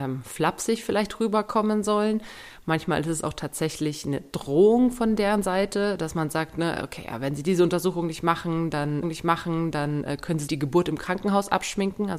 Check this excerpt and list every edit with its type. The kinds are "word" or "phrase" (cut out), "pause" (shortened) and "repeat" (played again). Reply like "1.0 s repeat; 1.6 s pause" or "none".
9.0 s repeat; 10.5 s word